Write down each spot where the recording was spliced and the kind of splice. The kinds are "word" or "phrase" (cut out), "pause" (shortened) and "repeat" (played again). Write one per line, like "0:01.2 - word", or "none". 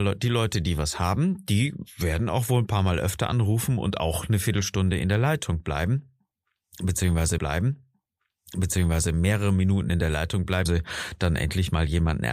0:07.4 - repeat
0:10.7 - word